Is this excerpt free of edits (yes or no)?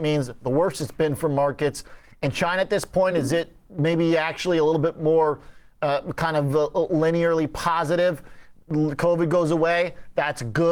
yes